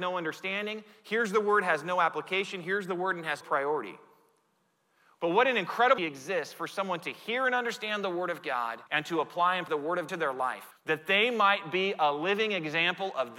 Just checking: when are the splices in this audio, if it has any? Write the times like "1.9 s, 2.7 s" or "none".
3.4 s, 6.0 s, 8.9 s, 9.7 s, 10.1 s, 10.7 s